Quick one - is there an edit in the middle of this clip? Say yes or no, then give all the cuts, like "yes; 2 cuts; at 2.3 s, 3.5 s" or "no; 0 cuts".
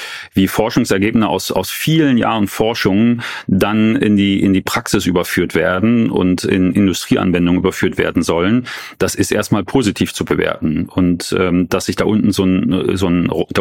no; 0 cuts